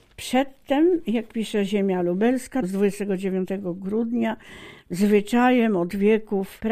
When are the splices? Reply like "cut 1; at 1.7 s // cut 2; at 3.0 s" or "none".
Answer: none